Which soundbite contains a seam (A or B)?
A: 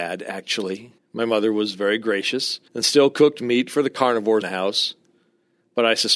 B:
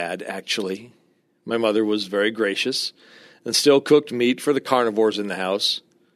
A